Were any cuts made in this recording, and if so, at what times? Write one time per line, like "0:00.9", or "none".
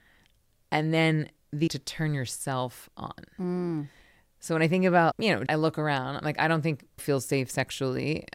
0:01.7
0:05.1
0:05.5
0:07.0

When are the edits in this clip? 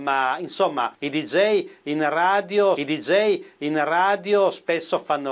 0:00.9
0:02.8

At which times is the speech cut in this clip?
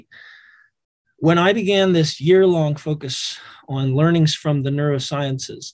none

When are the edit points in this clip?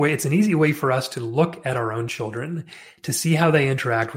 none

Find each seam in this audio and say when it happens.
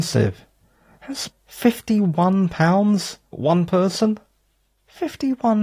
0:01.3
0:03.3

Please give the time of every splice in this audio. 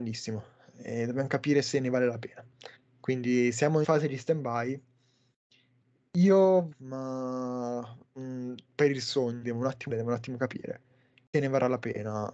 0:02.8
0:03.8
0:06.7
0:08.0
0:09.4
0:09.9
0:11.3

